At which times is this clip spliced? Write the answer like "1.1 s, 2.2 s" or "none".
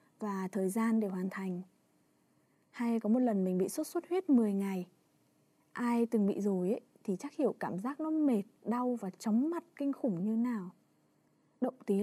none